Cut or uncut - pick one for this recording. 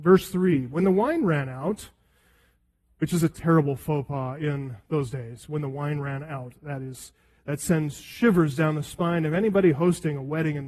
cut